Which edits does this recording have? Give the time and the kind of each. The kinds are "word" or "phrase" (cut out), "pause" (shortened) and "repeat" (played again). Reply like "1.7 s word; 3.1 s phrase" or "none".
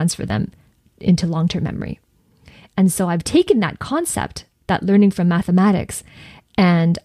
none